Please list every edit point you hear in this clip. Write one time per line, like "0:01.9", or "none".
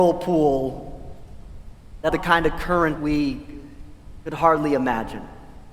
0:02.1
0:03.0